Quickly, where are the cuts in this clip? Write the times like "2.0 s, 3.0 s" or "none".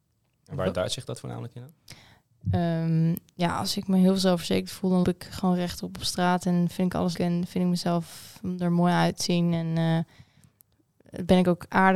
5.0 s, 7.1 s